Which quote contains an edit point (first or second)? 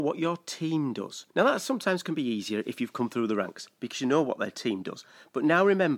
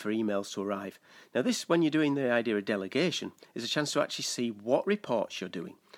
first